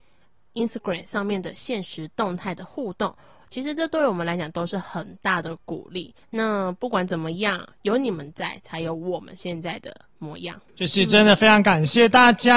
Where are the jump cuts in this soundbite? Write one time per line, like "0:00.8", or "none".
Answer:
0:06.2